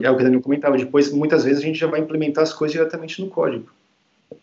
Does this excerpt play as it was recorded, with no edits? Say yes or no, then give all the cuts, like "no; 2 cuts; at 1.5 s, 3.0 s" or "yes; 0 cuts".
yes; 0 cuts